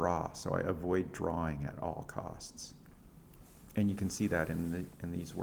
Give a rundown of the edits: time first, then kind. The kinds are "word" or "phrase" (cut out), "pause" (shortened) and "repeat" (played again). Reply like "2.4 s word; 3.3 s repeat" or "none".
none